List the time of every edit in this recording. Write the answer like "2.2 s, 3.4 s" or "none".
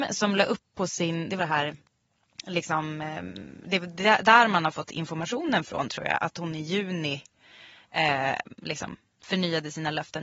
1.4 s